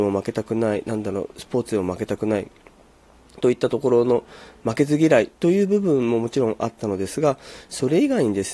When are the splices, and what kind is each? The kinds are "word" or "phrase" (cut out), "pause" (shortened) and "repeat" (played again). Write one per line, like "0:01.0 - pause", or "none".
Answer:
none

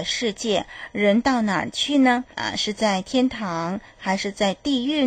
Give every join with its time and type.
0:02.3 - pause

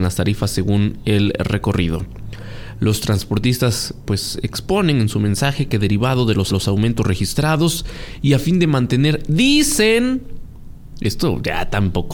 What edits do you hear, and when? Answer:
0:06.5 - repeat

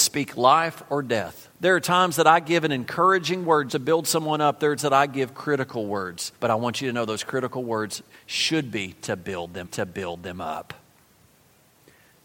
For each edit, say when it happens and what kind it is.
0:01.5 - pause
0:03.7 - word
0:04.8 - word
0:06.4 - pause
0:09.7 - repeat

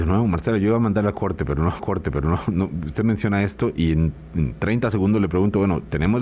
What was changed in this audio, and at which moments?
0:01.8 - repeat

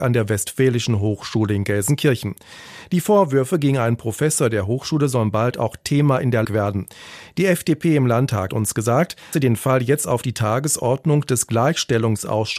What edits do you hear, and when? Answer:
0:06.4 - word
0:08.5 - word
0:09.3 - word

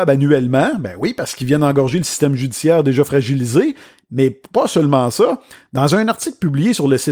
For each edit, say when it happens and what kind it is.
none

